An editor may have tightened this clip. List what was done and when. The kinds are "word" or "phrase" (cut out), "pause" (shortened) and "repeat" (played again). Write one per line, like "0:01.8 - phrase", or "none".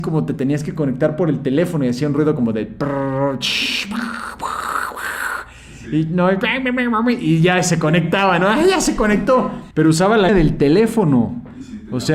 0:09.7 - pause
0:10.3 - word